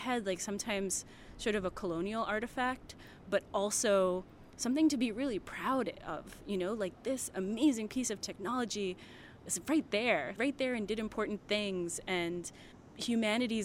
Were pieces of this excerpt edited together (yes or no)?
yes